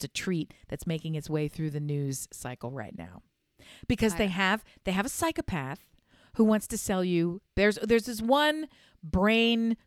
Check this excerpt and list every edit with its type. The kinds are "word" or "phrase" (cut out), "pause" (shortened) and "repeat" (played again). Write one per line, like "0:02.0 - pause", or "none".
none